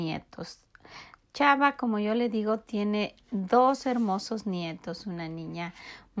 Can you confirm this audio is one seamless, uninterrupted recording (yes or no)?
yes